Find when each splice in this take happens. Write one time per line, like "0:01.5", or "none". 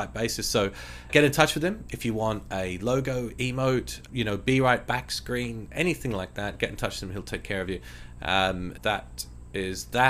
0:01.1
0:04.1
0:08.8